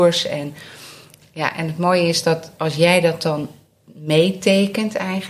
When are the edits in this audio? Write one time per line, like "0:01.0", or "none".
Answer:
none